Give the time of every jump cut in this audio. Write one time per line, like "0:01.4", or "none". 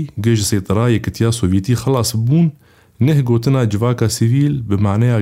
none